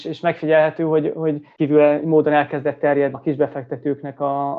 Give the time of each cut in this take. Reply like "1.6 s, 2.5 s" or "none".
3.1 s